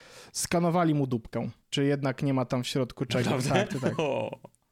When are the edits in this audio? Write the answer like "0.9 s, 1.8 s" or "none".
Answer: 1.6 s